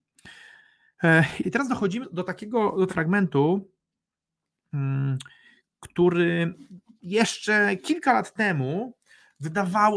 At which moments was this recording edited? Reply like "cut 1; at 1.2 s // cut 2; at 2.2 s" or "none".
cut 1; at 1.4 s // cut 2; at 2.0 s // cut 3; at 2.9 s